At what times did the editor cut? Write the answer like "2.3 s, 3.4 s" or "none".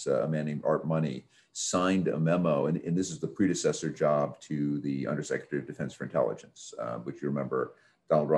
none